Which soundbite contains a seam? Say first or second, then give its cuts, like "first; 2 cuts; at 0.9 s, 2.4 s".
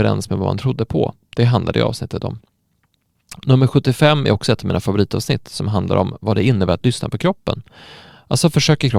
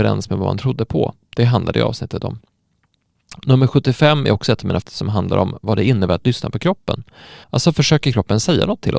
second; 2 cuts; at 4.8 s, 7.4 s